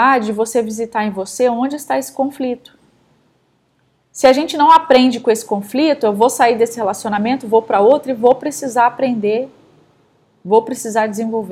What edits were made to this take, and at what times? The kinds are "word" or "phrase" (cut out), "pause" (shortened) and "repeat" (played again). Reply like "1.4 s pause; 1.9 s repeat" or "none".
none